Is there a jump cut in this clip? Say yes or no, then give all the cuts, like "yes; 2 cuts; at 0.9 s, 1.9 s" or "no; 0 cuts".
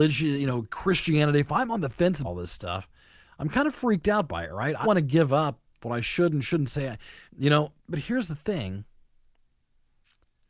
yes; 4 cuts; at 2.2 s, 4.8 s, 7.3 s, 7.8 s